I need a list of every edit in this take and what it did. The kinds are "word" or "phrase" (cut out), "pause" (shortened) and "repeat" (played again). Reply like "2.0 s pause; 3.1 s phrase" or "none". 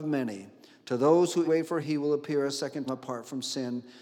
1.4 s word; 1.8 s word; 2.9 s word

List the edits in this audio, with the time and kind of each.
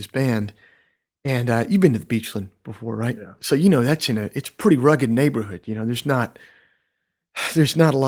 none

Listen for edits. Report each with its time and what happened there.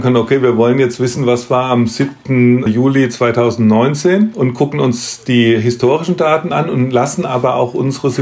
none

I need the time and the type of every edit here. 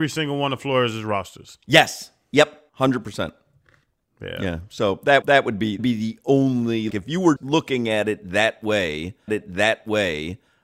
2.7 s pause; 5.2 s repeat; 5.8 s phrase; 6.9 s word; 7.4 s word; 9.3 s repeat

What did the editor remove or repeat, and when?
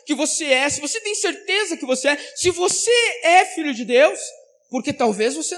none

